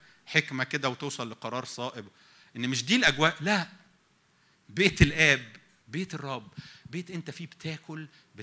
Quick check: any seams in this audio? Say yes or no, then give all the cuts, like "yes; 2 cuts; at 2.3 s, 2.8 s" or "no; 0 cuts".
no; 0 cuts